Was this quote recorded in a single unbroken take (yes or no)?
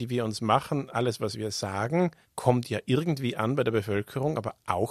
no